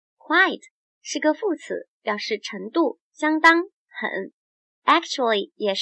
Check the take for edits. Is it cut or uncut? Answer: uncut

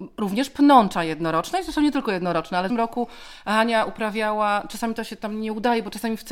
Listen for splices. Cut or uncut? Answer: cut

